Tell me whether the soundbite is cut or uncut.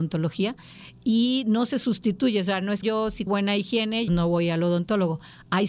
cut